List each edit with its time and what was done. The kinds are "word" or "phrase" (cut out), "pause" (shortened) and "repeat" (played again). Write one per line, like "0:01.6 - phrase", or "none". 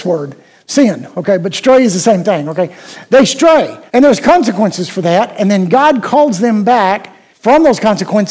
0:03.9 - pause
0:07.3 - pause